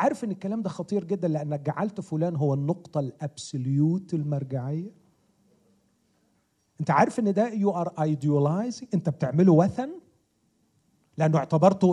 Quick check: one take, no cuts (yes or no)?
yes